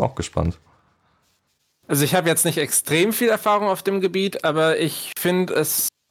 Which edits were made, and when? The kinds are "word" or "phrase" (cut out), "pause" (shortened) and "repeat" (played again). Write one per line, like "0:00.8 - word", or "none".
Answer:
none